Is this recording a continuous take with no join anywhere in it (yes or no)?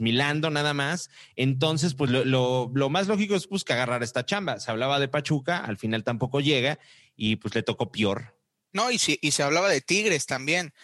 yes